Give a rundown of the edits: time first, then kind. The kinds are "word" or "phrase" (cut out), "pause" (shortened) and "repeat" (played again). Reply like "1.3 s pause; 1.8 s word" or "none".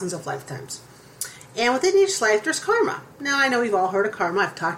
3.1 s pause